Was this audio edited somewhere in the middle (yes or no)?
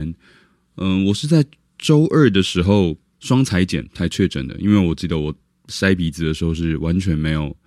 no